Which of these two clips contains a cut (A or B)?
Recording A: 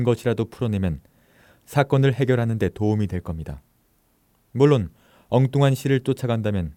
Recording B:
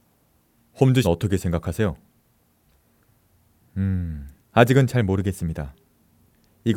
B